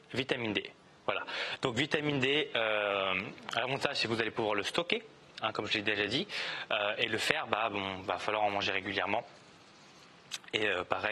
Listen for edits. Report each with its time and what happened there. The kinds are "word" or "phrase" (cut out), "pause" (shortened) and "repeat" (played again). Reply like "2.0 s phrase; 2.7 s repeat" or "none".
none